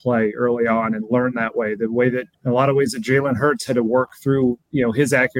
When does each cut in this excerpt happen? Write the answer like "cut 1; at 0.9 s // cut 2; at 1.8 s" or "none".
cut 1; at 2.3 s